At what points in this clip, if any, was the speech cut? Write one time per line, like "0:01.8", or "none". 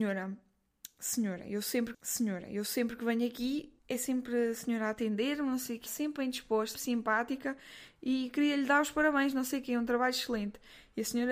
0:01.9
0:03.8
0:05.9
0:06.7